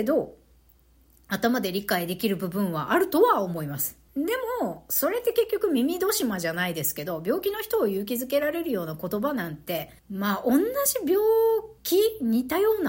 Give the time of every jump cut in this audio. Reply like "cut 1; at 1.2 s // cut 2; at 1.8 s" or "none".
cut 1; at 4.1 s // cut 2; at 10.0 s // cut 3; at 11.8 s